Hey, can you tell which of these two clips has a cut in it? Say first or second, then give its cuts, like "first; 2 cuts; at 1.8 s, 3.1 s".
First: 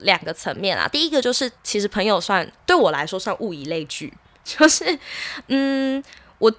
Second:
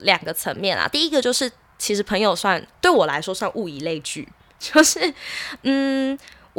first; 1 cut; at 1.6 s